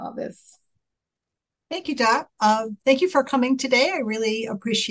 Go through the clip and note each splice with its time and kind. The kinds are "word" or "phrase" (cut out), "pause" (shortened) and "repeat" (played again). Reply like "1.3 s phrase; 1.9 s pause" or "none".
2.8 s pause